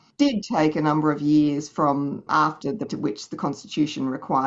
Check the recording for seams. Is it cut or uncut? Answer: cut